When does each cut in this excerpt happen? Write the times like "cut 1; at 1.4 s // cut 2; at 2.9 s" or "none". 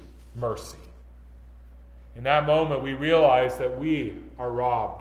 none

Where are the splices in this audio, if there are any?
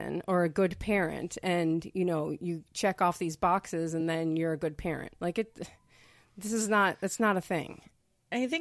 none

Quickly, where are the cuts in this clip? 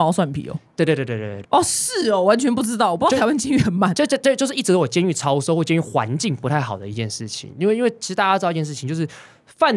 cut 1; at 1.4 s

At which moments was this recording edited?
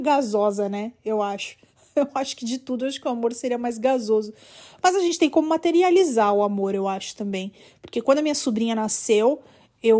none

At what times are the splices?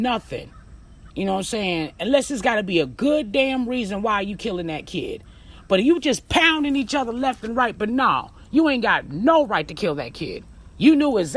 cut 1; at 1.1 s

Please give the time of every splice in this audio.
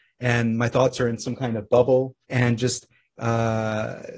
cut 1; at 2.2 s

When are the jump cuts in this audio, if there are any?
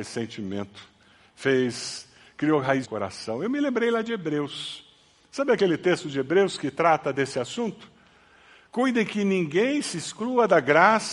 cut 1; at 2.8 s

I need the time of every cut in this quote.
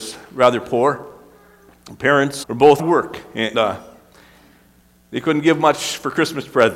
cut 1; at 2.4 s // cut 2; at 2.8 s // cut 3; at 3.5 s

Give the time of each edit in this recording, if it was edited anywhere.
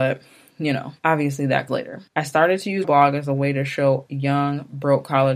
cut 1; at 1.0 s // cut 2; at 1.7 s // cut 3; at 2.1 s // cut 4; at 2.8 s // cut 5; at 4.1 s

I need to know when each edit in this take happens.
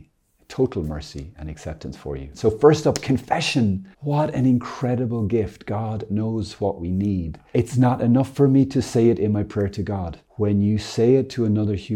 cut 1; at 3.9 s // cut 2; at 10.3 s

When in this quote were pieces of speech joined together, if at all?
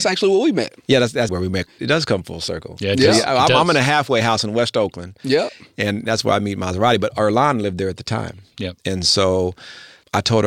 cut 1; at 1.3 s

